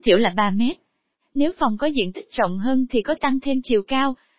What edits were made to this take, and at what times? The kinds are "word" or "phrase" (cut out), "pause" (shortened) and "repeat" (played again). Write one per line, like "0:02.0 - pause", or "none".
0:03.2 - word